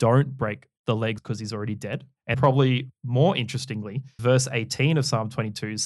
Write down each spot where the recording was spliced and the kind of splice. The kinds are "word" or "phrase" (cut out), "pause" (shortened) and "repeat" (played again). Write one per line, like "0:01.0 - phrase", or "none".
0:01.2 - phrase
0:02.3 - word
0:04.2 - word